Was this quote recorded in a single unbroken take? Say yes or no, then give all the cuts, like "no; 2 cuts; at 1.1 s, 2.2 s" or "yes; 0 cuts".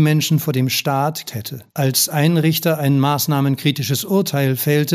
no; 2 cuts; at 1.3 s, 1.7 s